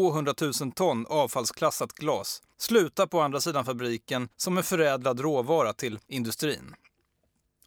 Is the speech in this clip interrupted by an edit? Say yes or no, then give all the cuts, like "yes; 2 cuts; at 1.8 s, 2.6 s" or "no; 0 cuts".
yes; 3 cuts; at 2.5 s, 4.3 s, 6.0 s